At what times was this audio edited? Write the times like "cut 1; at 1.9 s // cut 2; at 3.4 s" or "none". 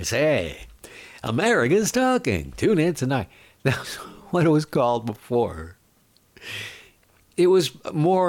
none